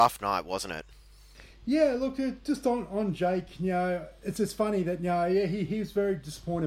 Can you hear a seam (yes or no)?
no